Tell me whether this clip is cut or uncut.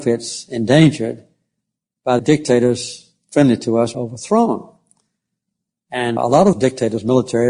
cut